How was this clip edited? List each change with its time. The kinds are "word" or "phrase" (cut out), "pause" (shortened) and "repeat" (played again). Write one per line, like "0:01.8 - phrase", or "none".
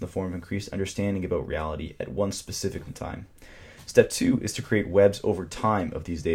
0:02.9 - word